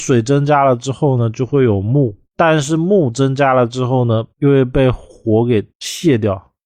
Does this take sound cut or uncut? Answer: cut